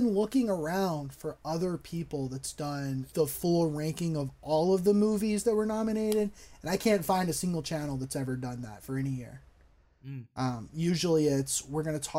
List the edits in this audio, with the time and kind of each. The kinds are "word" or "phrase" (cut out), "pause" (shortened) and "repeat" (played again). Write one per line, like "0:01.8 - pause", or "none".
0:03.1 - word